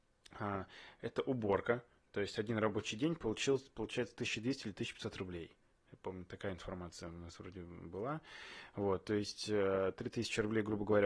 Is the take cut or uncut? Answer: uncut